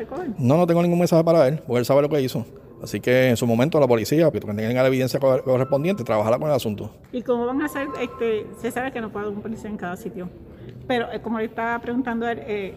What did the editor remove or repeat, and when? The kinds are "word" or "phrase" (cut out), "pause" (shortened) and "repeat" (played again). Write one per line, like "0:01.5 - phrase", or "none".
0:04.3 - word
0:06.0 - word
0:07.0 - pause